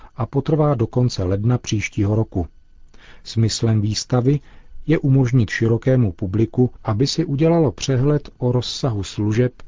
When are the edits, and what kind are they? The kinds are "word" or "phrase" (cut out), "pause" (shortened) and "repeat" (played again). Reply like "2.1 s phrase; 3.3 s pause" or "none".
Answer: none

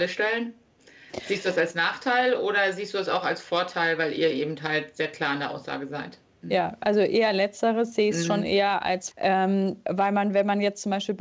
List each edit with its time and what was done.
9.1 s word

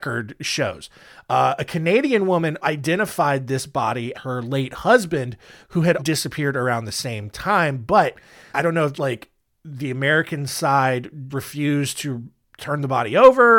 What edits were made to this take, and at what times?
2.6 s word; 4.1 s word; 6.0 s word; 8.5 s word; 8.9 s word; 11.3 s word

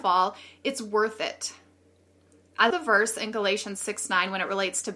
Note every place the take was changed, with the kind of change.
2.7 s word

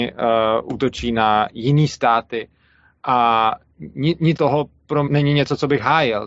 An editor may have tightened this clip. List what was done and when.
4.4 s word; 5.1 s word

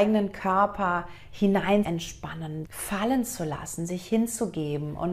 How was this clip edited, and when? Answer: 1.8 s word; 2.7 s word

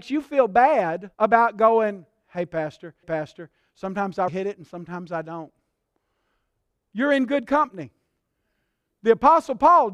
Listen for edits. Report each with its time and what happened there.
1.1 s pause; 3.0 s repeat; 4.3 s word

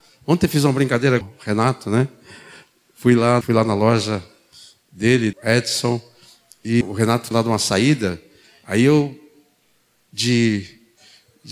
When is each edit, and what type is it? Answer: 1.2 s word; 3.4 s word; 5.3 s word; 6.8 s word; 7.3 s word

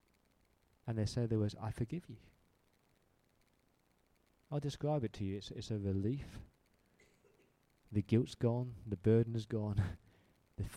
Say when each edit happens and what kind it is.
none

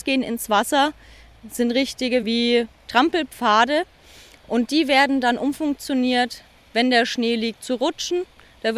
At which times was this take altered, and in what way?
none

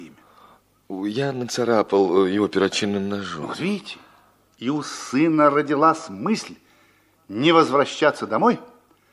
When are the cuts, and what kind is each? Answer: none

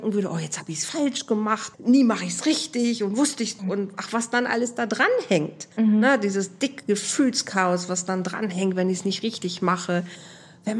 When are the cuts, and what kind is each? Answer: 1.7 s word; 3.6 s word; 5.7 s pause

